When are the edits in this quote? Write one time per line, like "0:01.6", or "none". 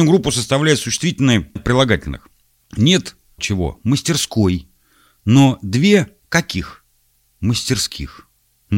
0:01.6
0:03.4